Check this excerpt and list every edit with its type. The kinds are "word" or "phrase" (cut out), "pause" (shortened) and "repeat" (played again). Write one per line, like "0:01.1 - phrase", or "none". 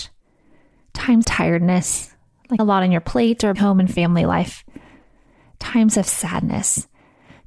0:01.2 - word
0:02.6 - word
0:03.5 - word